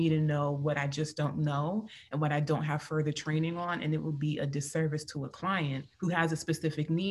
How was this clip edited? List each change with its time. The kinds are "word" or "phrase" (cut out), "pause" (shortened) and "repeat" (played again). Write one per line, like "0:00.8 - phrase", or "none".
0:05.9 - pause